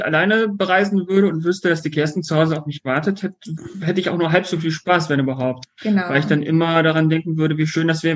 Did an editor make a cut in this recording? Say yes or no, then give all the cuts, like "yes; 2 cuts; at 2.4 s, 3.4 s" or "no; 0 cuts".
no; 0 cuts